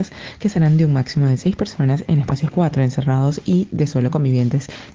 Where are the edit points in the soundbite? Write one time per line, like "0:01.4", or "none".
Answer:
0:02.5